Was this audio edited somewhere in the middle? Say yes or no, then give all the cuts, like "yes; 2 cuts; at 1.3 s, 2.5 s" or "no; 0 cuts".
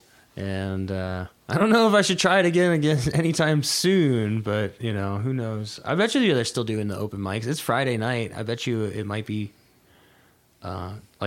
yes; 1 cut; at 1.4 s